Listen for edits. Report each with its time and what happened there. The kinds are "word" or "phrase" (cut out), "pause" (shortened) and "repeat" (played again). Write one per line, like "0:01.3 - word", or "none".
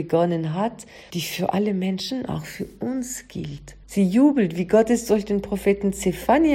0:01.1 - word
0:03.8 - pause